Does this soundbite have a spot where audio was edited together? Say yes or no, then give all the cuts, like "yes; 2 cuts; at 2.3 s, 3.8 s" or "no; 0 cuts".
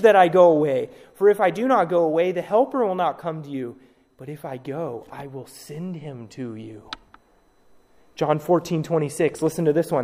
no; 0 cuts